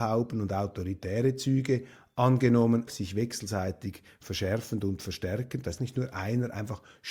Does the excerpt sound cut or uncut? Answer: cut